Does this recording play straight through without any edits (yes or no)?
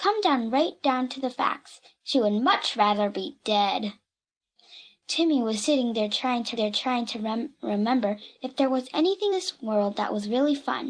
no